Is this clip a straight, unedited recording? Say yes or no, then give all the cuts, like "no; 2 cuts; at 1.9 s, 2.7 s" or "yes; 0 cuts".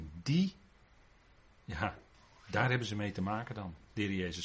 no; 1 cut; at 2.1 s